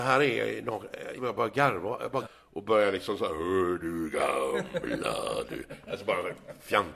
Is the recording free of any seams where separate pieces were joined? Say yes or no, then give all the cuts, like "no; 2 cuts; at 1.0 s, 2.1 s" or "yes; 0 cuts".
no; 2 cuts; at 1.2 s, 2.2 s